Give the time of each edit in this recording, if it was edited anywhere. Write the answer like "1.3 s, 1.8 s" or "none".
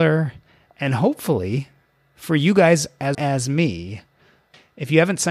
3.1 s